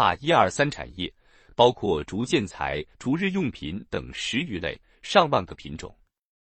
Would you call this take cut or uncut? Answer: cut